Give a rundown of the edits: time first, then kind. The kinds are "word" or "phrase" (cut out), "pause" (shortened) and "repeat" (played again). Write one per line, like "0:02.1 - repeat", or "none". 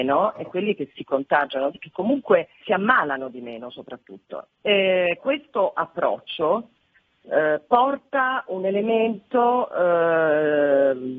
0:01.8 - word
0:02.6 - word
0:05.2 - word

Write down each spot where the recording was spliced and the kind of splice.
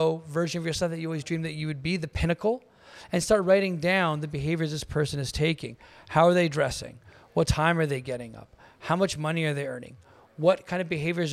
none

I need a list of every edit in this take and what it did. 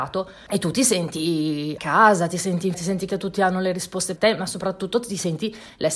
0:01.8 - word
0:02.7 - word
0:03.1 - word
0:04.2 - word

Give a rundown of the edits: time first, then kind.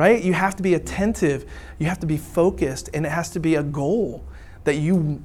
none

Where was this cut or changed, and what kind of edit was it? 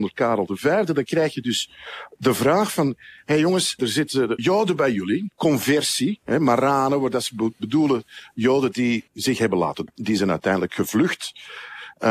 0:03.8 - word
0:04.4 - word
0:09.1 - word
0:09.9 - word

